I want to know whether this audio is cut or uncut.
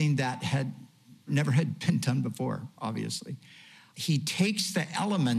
uncut